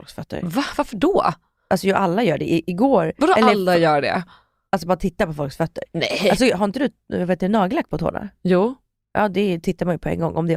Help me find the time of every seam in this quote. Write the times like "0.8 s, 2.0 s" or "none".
none